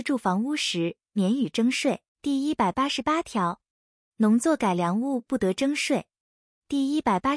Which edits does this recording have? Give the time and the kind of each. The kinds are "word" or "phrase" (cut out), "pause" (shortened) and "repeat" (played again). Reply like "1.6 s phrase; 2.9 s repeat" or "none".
2.1 s pause